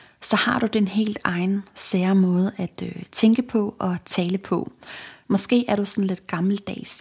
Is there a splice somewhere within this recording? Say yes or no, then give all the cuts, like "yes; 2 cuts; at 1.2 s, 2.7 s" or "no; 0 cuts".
no; 0 cuts